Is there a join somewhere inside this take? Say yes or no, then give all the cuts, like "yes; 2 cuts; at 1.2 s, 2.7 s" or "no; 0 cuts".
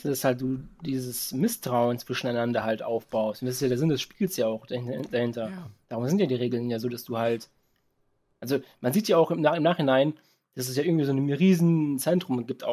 no; 0 cuts